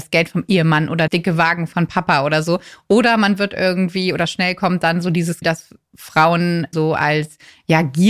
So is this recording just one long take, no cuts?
no; 3 cuts; at 1.1 s, 5.4 s, 6.7 s

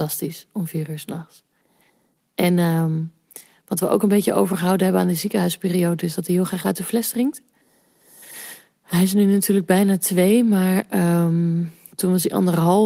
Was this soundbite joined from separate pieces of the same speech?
no; 0 cuts

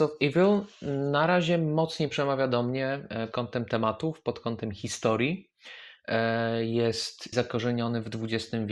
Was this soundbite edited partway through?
yes; 2 cuts; at 3.3 s, 7.3 s

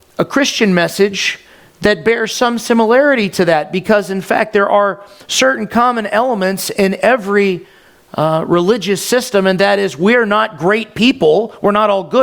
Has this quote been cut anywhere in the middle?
no; 0 cuts

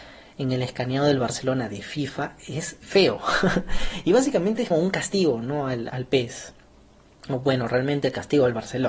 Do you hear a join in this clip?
yes; 3 cuts; at 2.8 s, 4.7 s, 5.9 s

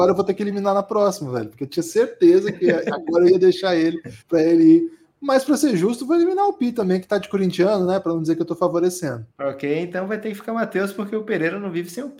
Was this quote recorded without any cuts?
no; 2 cuts; at 4.2 s, 9.3 s

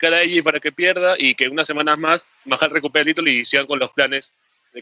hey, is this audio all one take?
yes; 0 cuts

